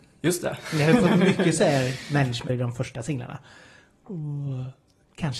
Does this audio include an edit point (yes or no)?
yes